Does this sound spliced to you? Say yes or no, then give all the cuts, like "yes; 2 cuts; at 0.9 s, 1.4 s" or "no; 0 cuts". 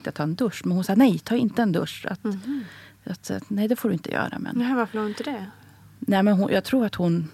yes; 1 cut; at 4.9 s